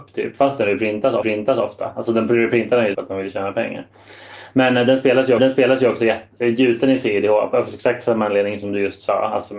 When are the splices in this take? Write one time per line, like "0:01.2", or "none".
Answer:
0:01.2
0:02.9
0:05.4